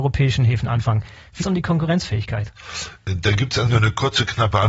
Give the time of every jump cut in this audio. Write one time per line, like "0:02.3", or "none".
0:01.4
0:03.6